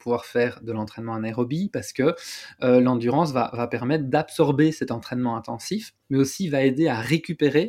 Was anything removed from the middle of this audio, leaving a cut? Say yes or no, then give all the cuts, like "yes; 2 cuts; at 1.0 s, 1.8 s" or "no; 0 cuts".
yes; 1 cut; at 6.0 s